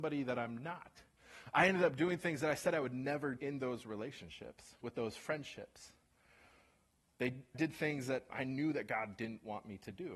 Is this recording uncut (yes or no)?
no